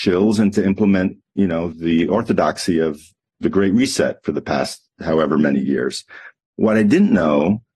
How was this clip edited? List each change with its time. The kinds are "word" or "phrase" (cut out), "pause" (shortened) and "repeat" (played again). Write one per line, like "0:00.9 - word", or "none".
0:01.7 - word
0:03.4 - word